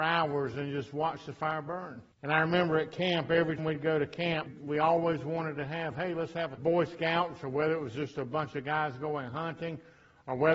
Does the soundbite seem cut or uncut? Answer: cut